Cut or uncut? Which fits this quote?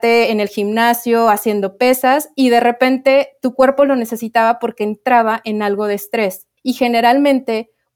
cut